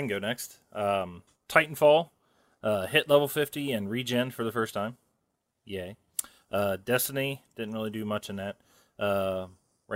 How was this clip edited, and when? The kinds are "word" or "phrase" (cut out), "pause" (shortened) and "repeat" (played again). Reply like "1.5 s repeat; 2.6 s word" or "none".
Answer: none